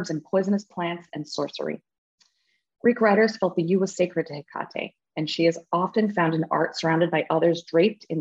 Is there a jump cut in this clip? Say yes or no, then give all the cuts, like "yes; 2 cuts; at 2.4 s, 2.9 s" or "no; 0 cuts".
no; 0 cuts